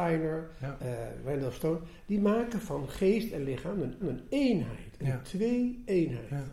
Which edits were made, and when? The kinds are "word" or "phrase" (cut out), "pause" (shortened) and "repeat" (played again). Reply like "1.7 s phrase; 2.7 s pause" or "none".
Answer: 4.0 s repeat